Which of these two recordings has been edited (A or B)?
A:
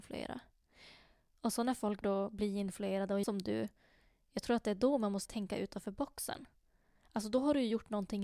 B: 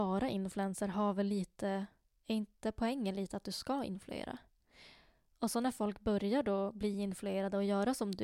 A